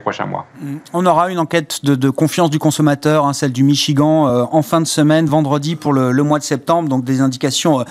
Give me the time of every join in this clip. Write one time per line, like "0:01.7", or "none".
none